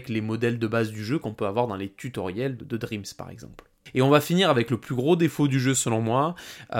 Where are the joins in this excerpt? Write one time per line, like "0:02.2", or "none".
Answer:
0:02.6